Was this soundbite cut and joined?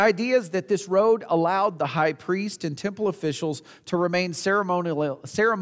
no; 0 cuts

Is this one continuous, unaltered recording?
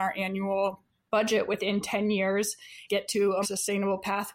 no; 2 cuts; at 2.9 s, 3.4 s

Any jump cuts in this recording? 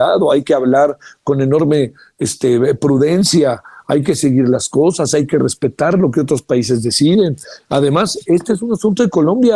no; 0 cuts

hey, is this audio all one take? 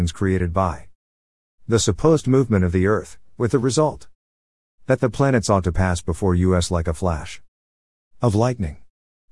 yes; 0 cuts

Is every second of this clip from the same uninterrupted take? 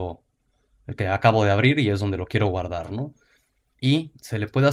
yes; 0 cuts

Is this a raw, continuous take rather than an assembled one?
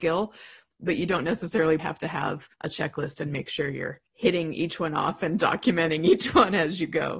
no; 3 cuts; at 1.8 s, 2.5 s, 4.1 s

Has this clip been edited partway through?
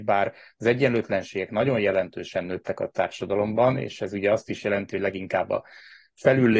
no; 0 cuts

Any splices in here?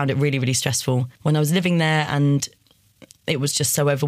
yes; 1 cut; at 1.1 s

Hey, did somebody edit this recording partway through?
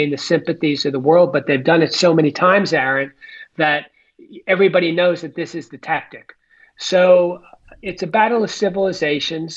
no; 0 cuts

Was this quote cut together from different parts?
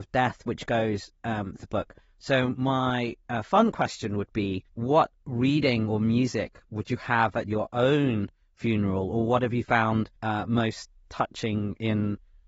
yes; 3 cuts; at 1.6 s, 4.7 s, 10.2 s

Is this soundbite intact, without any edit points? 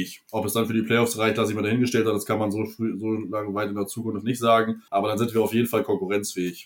no; 1 cut; at 4.9 s

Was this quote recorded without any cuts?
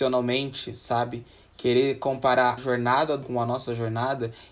no; 2 cuts; at 2.6 s, 3.2 s

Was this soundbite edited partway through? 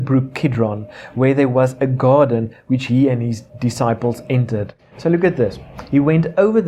yes; 2 cuts; at 3.5 s, 4.8 s

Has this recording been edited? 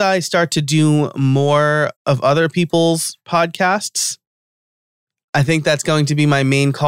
yes; 1 cut; at 1.9 s

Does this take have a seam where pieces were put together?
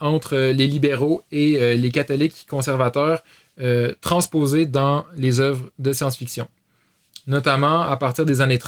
no; 0 cuts

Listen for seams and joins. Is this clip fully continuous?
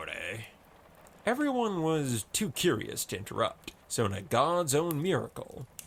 no; 1 cut; at 3.8 s

